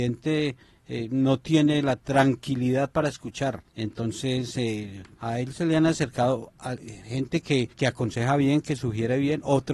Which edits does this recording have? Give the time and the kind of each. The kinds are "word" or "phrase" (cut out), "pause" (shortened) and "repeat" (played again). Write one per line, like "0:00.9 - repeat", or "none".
0:03.7 - pause
0:05.1 - pause
0:07.7 - pause